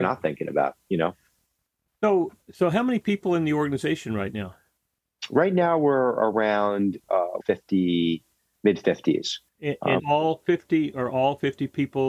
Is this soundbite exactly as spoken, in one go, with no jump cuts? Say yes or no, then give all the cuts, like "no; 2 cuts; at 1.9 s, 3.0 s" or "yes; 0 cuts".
no; 4 cuts; at 2.4 s, 7.4 s, 9.5 s, 10.0 s